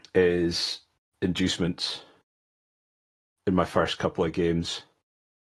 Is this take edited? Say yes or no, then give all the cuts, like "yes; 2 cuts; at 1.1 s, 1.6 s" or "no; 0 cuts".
no; 0 cuts